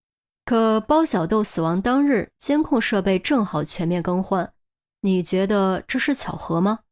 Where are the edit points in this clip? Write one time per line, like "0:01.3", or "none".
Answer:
none